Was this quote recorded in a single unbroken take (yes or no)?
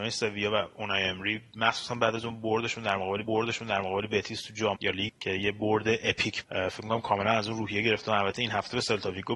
no